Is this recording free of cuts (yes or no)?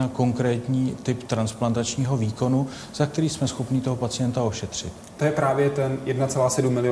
yes